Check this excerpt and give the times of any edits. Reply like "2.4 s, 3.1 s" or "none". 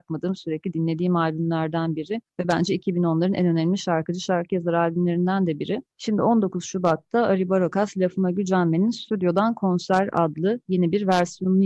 2.3 s, 5.9 s